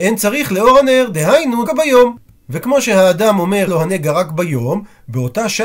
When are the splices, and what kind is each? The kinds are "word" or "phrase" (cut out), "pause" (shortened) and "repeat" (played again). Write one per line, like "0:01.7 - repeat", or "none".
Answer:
0:01.7 - word
0:03.7 - word